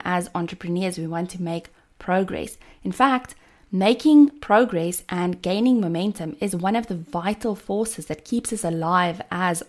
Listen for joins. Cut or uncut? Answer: uncut